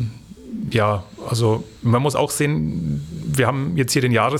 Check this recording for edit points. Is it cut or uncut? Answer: cut